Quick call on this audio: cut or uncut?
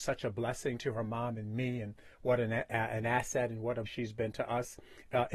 cut